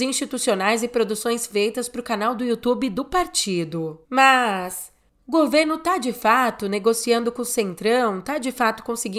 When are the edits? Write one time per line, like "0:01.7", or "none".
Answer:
0:04.0